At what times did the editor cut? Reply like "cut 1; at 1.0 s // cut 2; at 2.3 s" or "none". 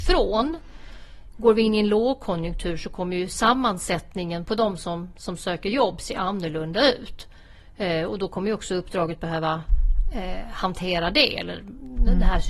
none